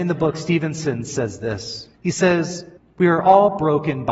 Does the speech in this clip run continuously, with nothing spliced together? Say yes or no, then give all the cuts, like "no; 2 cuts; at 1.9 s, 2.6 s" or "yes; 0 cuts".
no; 2 cuts; at 1.9 s, 2.8 s